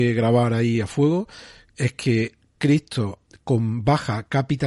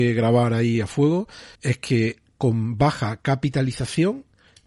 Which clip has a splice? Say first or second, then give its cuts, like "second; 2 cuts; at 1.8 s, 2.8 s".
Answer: second; 2 cuts; at 1.5 s, 2.4 s